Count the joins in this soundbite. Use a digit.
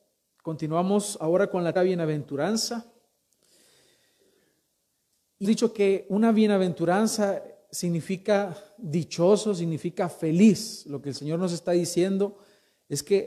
2